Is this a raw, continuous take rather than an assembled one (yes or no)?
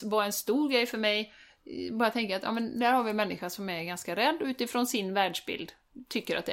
yes